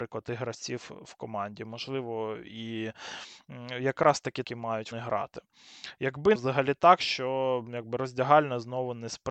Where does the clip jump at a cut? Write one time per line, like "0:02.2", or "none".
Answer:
0:04.4
0:04.9
0:06.4